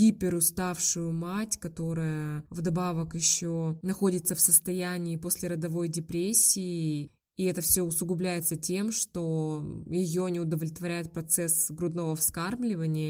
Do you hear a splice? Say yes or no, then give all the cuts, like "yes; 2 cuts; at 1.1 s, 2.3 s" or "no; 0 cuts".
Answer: no; 0 cuts